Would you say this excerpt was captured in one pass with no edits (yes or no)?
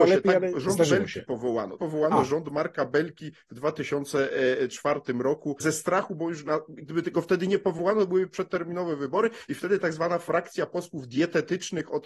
no